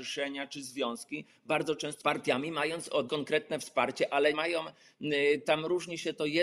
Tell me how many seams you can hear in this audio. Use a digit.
3